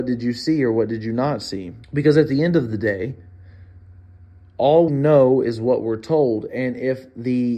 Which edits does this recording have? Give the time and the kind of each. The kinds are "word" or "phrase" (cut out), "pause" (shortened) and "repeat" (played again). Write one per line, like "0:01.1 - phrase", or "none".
0:01.8 - pause
0:04.9 - word